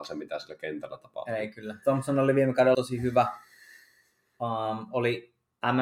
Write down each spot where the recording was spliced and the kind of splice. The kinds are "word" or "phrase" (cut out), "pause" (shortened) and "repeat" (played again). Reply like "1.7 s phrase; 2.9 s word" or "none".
2.7 s word